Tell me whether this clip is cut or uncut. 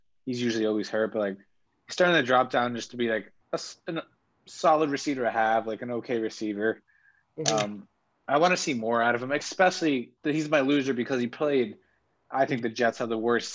cut